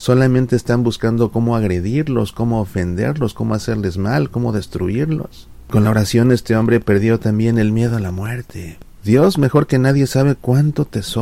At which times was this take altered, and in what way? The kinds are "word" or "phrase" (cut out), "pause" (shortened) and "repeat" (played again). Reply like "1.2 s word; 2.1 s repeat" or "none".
none